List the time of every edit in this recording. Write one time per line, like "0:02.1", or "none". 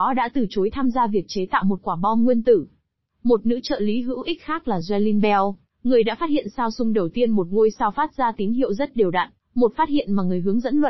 none